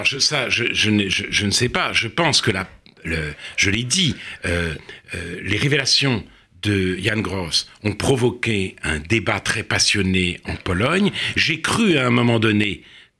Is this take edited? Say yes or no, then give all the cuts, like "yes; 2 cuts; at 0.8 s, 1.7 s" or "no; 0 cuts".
no; 0 cuts